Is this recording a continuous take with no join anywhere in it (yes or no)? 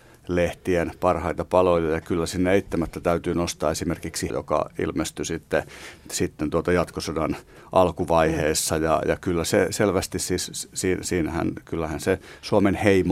no